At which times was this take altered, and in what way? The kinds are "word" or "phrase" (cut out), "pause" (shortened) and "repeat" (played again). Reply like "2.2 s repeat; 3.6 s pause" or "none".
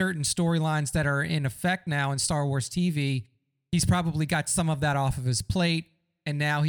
none

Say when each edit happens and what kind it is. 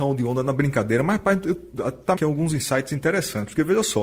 2.2 s phrase

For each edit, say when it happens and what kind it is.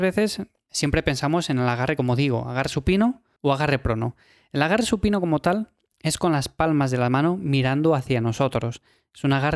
none

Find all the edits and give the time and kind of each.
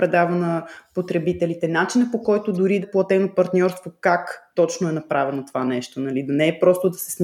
2.8 s word

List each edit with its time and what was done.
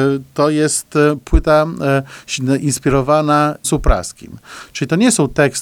3.6 s word

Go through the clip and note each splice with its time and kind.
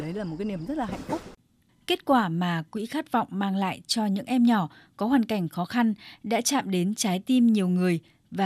none

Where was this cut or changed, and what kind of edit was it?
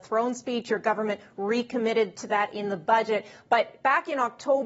none

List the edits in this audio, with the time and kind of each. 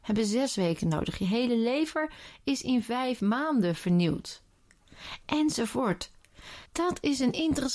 6.7 s pause

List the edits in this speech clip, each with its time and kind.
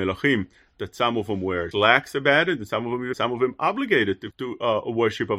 1.7 s word; 3.1 s word; 4.3 s word

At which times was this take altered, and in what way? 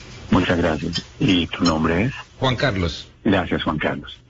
2.3 s pause; 3.1 s pause

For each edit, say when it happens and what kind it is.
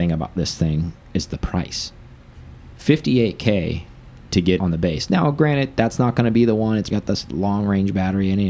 4.6 s word; 6.9 s word

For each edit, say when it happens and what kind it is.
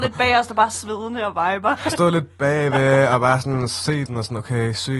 1.9 s word; 4.1 s word

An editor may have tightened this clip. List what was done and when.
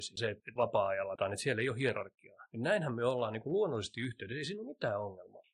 none

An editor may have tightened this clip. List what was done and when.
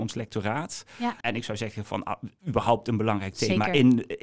1.2 s pause

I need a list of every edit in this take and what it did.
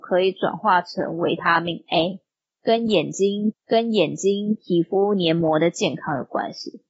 3.5 s repeat

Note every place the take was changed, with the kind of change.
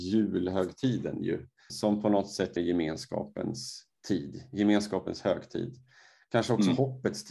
1.7 s word; 2.6 s phrase

